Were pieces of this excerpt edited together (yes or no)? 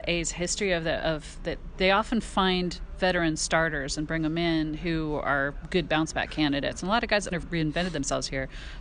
yes